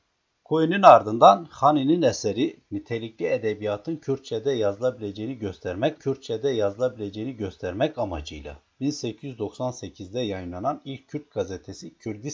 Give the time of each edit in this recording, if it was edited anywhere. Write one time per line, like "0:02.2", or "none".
0:06.0